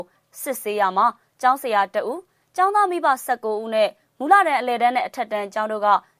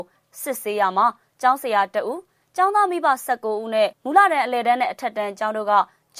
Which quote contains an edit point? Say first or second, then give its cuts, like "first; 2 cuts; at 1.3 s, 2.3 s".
second; 1 cut; at 3.9 s